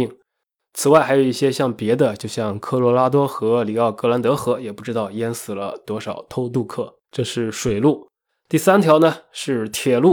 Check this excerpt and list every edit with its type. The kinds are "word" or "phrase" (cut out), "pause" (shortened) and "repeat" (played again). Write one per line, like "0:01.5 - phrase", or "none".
0:07.0 - pause
0:08.3 - pause